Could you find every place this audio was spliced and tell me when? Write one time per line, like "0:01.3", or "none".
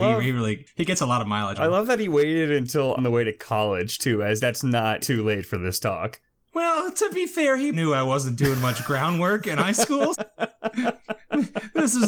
0:01.6
0:03.0
0:04.4
0:05.0
0:07.7
0:10.1